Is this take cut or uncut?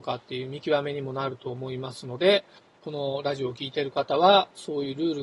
cut